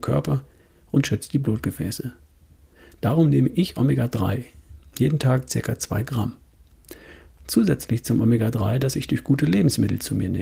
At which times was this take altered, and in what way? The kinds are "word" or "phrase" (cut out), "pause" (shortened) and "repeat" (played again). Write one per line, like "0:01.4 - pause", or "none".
none